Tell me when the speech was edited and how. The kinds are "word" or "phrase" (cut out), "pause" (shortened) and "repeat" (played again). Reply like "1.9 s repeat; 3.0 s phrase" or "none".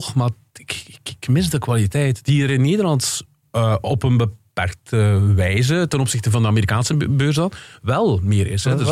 none